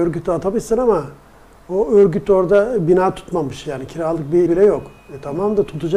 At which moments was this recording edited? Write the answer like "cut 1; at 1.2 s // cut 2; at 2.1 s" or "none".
cut 1; at 4.5 s